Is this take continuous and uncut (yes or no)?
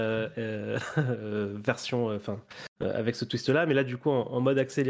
no